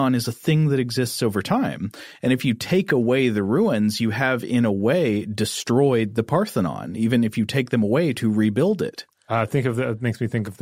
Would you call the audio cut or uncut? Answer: uncut